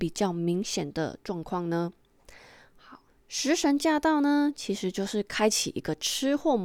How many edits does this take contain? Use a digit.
1